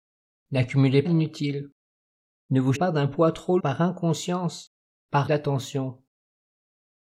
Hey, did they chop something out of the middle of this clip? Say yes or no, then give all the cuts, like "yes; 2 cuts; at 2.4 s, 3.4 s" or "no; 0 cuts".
yes; 4 cuts; at 1.0 s, 2.7 s, 3.6 s, 5.3 s